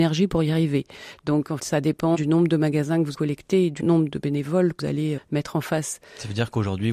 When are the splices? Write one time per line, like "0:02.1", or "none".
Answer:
0:01.6
0:02.1
0:03.1
0:03.8
0:04.8
0:05.2